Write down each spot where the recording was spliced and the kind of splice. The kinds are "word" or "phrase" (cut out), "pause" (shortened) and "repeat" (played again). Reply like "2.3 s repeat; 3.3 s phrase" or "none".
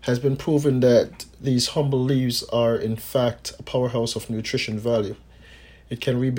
none